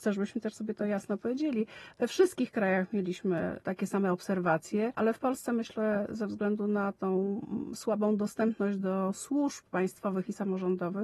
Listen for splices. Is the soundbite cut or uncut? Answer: uncut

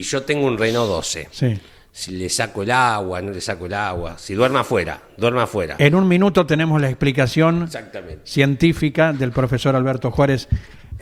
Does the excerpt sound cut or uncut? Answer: uncut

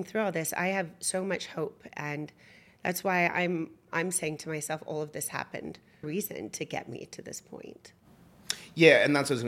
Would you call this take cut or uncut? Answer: cut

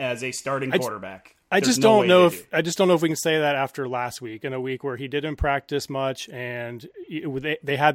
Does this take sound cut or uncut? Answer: uncut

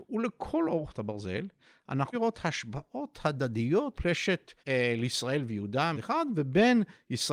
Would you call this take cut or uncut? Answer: cut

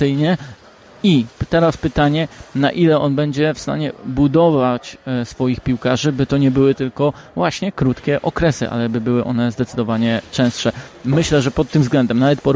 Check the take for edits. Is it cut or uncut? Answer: uncut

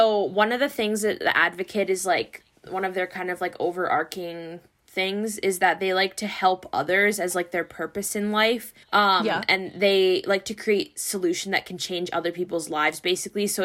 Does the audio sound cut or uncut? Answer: cut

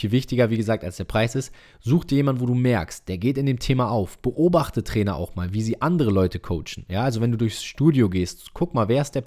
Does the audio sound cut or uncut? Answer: uncut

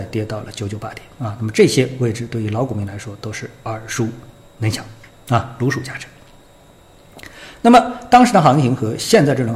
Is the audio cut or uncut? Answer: uncut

